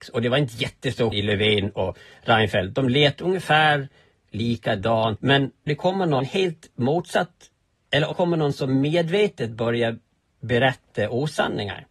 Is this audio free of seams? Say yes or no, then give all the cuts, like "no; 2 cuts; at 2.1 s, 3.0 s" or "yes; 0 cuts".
no; 4 cuts; at 1.1 s, 5.7 s, 6.2 s, 8.1 s